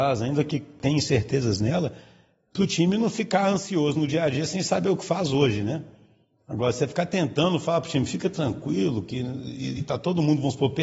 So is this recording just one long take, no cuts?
yes; 0 cuts

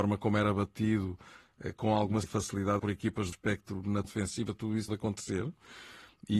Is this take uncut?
no; 5 cuts; at 2.2 s, 2.8 s, 3.3 s, 4.0 s, 4.9 s

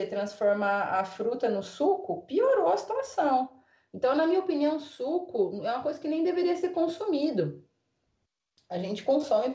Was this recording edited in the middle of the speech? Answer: no; 0 cuts

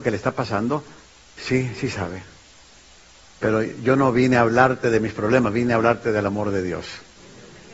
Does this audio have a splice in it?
no; 0 cuts

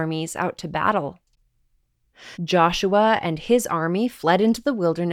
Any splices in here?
yes; 1 cut; at 2.3 s

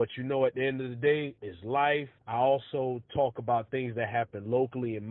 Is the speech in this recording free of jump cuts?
no; 2 cuts; at 1.4 s, 2.2 s

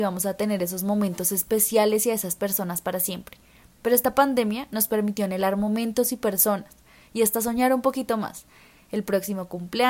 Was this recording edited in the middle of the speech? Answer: no; 0 cuts

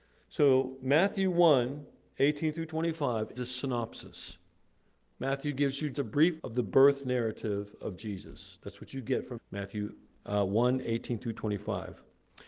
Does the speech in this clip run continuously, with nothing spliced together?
no; 4 cuts; at 3.4 s, 5.9 s, 6.4 s, 9.4 s

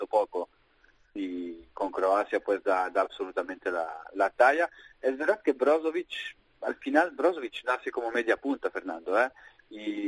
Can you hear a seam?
no; 0 cuts

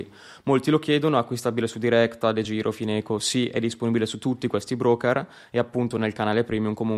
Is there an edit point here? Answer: no; 0 cuts

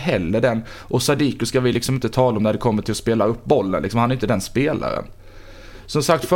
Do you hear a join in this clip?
no; 0 cuts

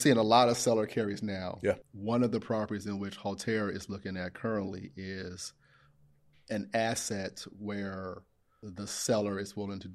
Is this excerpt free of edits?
yes; 0 cuts

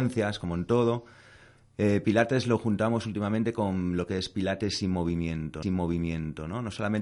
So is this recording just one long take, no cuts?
no; 1 cut; at 5.6 s

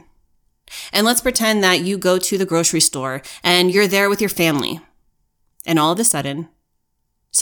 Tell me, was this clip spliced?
no; 0 cuts

